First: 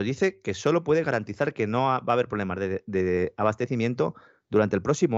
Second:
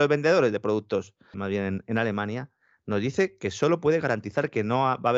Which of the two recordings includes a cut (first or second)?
second